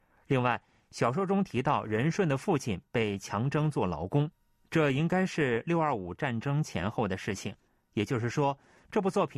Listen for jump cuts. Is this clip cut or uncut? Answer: uncut